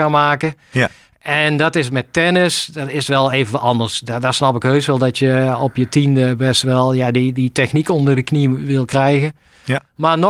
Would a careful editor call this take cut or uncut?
uncut